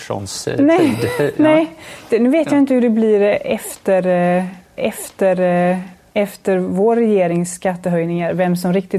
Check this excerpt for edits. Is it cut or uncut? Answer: cut